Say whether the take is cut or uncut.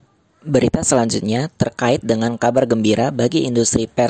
uncut